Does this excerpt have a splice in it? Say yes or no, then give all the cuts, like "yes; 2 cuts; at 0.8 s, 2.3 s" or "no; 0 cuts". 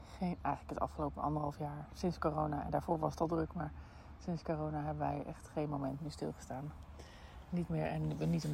no; 0 cuts